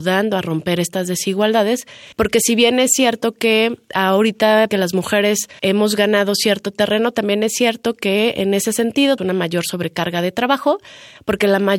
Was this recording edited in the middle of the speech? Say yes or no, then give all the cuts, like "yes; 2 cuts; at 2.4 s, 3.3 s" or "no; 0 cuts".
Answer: yes; 4 cuts; at 2.1 s, 4.7 s, 5.6 s, 9.2 s